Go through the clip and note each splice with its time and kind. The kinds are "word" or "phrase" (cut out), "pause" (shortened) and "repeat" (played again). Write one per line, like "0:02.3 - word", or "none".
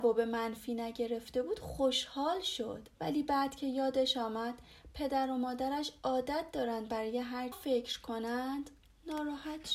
0:02.9 - pause
0:07.5 - phrase